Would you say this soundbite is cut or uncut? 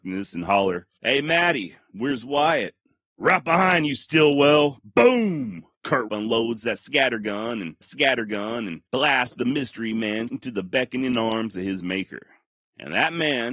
cut